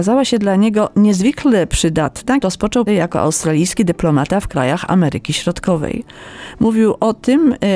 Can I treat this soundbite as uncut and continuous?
no; 2 cuts; at 2.4 s, 2.9 s

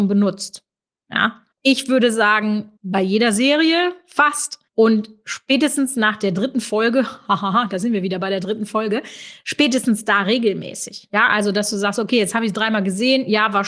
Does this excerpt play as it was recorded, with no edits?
no; 3 cuts; at 1.5 s, 2.8 s, 4.7 s

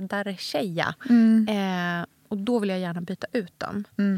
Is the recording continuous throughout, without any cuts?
yes; 0 cuts

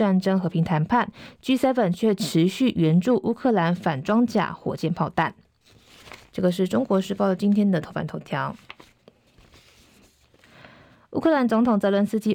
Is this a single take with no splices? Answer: yes; 0 cuts

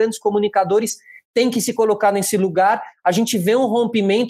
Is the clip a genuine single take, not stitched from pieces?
yes; 0 cuts

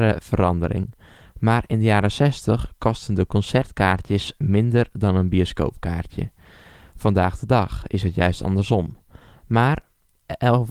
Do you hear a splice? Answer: no; 0 cuts

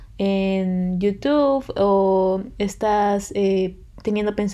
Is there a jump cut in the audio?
no; 0 cuts

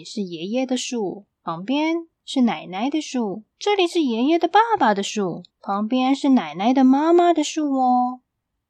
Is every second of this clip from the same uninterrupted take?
no; 4 cuts; at 1.3 s, 2.1 s, 3.5 s, 5.5 s

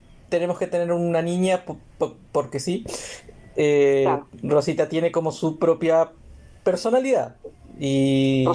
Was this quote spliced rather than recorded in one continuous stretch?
no; 0 cuts

